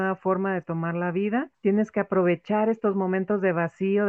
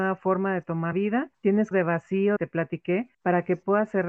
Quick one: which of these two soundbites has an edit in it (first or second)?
second